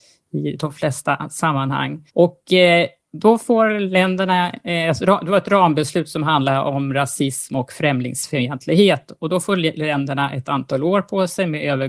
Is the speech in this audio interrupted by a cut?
yes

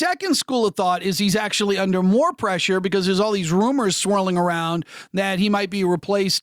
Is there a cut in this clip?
no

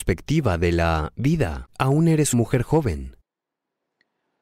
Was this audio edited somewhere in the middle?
yes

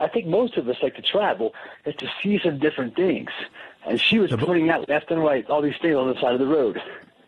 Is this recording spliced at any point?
no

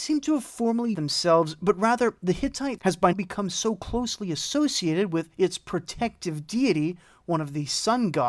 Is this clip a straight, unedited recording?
no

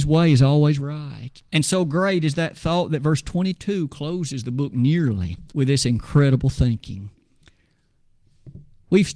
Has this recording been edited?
yes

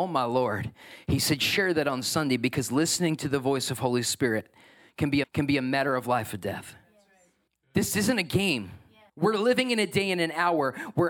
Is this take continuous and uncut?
no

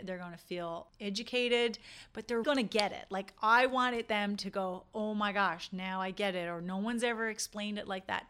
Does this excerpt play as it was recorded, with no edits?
no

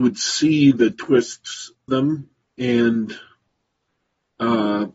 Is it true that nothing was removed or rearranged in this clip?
no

